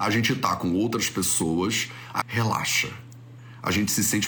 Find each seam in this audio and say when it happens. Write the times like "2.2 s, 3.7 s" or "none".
2.2 s